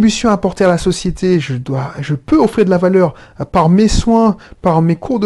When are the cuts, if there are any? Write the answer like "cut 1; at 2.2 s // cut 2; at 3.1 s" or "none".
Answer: none